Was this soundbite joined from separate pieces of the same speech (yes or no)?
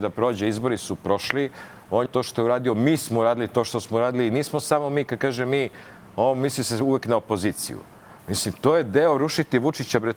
yes